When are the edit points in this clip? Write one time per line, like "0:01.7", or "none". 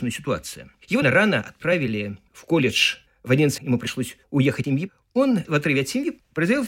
0:01.0
0:02.3
0:03.6
0:04.6
0:05.4